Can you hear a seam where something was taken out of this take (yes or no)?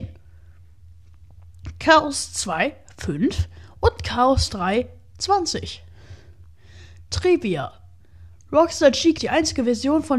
yes